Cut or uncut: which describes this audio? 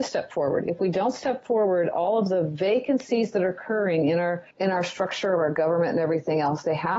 cut